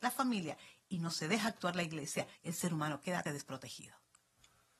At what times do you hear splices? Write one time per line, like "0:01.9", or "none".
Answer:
0:02.3
0:03.2